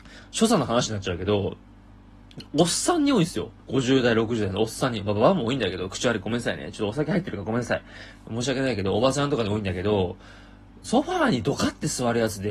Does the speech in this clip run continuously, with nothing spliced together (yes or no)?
no